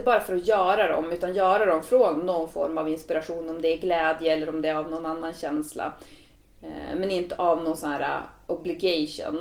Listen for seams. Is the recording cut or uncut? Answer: uncut